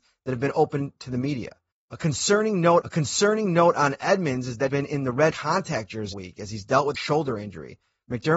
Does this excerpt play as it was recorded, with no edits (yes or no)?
no